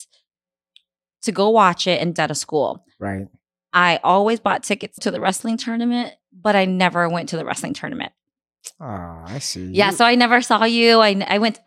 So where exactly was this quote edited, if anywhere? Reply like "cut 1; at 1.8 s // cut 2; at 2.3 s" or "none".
cut 1; at 2.2 s // cut 2; at 5.0 s // cut 3; at 6.2 s